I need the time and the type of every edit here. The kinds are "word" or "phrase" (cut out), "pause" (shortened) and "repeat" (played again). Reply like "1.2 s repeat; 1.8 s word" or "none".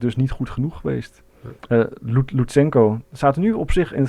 none